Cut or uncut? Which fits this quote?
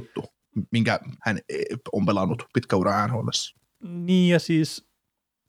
cut